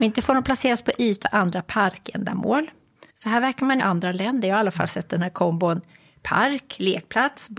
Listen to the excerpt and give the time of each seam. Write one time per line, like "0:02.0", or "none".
0:01.2
0:03.1
0:03.8